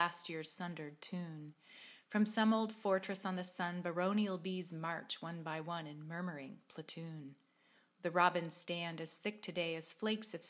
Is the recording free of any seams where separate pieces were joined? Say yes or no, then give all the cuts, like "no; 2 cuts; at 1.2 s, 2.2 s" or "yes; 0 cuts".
yes; 0 cuts